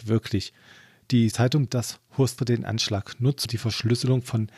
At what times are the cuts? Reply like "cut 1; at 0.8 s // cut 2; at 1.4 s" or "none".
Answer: cut 1; at 1.3 s // cut 2; at 1.7 s // cut 3; at 2.4 s // cut 4; at 3.4 s